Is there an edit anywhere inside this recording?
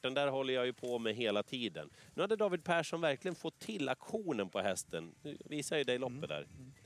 no; 0 cuts

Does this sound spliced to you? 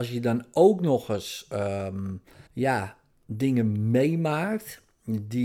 yes; 1 cut; at 2.5 s

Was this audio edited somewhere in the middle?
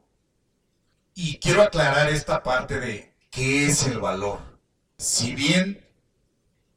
no; 0 cuts

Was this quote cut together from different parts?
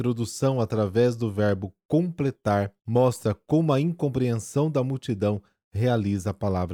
yes; 1 cut; at 2.8 s

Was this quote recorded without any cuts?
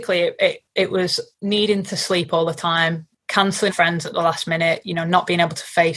no; 1 cut; at 3.7 s

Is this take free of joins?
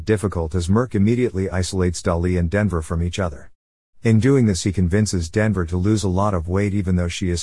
yes; 0 cuts

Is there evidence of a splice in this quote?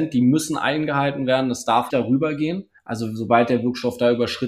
yes; 2 cuts; at 1.9 s, 2.8 s

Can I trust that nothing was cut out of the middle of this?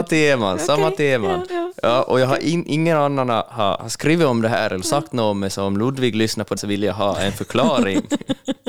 no; 2 cuts; at 1.5 s, 6.6 s

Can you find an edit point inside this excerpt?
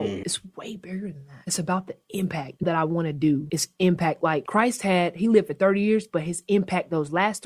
yes; 1 cut; at 2.6 s

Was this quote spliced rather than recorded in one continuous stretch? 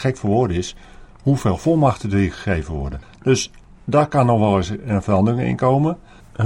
no; 0 cuts

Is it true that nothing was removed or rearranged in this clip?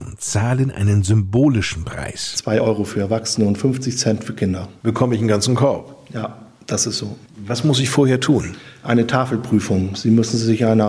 yes; 0 cuts

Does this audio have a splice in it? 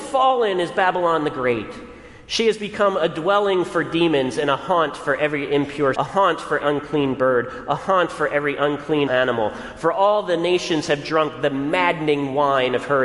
yes; 3 cuts; at 5.9 s, 6.6 s, 9.1 s

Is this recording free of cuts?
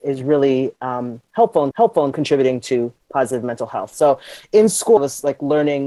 no; 2 cuts; at 1.7 s, 5.0 s

